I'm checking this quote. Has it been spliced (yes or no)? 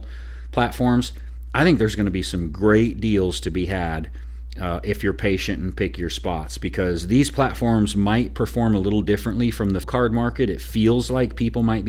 yes